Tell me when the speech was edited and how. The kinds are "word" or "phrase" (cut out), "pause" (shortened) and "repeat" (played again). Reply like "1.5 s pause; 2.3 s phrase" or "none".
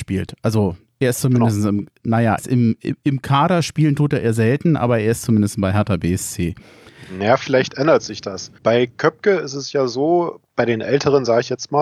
2.4 s word; 8.6 s pause